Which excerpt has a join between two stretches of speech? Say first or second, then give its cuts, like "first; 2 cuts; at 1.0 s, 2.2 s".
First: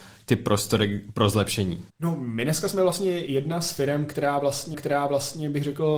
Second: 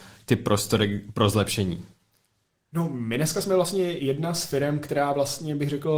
first; 2 cuts; at 1.9 s, 4.7 s